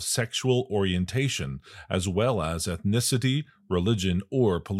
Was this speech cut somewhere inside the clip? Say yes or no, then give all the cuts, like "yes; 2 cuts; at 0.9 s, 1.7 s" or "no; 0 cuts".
no; 0 cuts